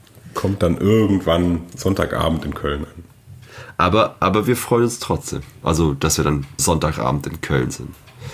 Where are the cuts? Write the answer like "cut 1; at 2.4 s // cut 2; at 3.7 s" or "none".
cut 1; at 6.6 s